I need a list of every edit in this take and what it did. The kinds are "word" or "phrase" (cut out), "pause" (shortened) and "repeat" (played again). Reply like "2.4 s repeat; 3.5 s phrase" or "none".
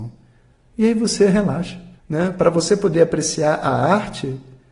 2.0 s pause